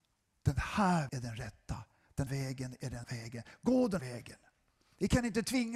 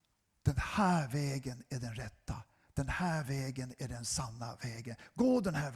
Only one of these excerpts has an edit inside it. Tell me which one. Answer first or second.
first